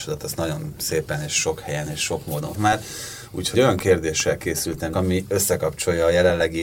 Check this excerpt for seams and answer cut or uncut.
cut